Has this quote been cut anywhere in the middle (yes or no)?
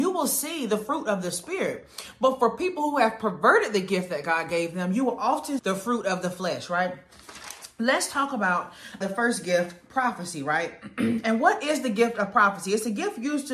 yes